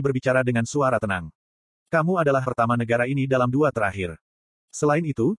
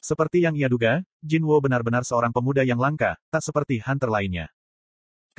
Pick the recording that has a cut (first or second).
first